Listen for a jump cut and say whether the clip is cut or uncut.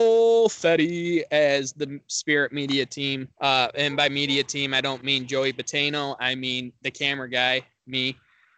cut